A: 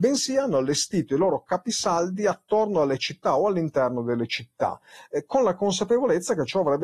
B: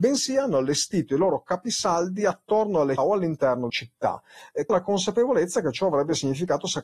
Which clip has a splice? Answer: B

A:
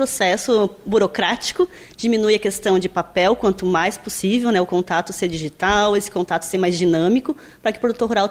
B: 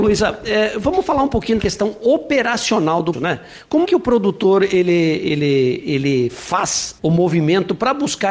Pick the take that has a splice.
B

